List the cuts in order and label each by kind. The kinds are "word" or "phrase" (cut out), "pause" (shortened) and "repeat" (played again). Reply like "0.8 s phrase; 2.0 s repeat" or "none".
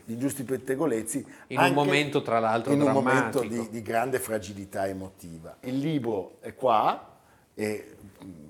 none